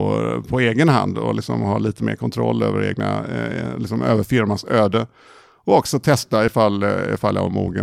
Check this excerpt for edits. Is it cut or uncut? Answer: uncut